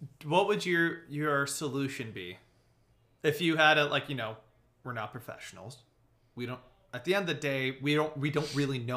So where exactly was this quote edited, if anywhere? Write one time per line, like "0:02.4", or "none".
none